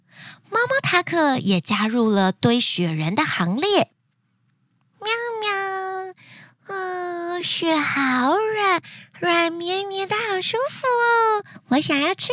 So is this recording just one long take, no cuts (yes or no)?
yes